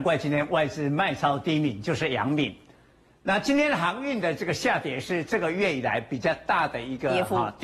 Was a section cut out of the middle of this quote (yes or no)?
no